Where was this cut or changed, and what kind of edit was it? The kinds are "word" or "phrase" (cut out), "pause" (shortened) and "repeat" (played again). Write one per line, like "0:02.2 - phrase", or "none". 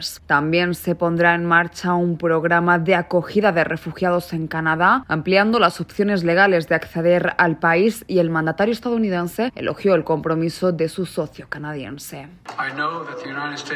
none